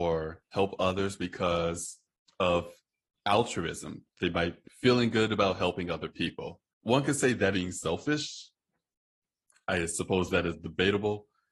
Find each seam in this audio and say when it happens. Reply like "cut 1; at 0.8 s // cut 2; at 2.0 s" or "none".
cut 1; at 4.6 s // cut 2; at 6.7 s // cut 3; at 7.5 s